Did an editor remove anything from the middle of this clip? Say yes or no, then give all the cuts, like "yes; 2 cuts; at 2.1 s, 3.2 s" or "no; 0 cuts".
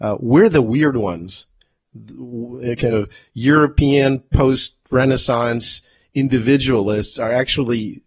no; 0 cuts